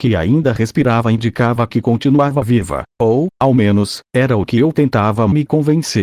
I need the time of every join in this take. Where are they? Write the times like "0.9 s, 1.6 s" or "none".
2.9 s